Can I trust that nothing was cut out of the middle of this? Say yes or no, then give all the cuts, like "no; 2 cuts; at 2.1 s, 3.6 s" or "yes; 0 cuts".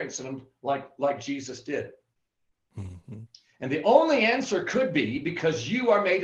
yes; 0 cuts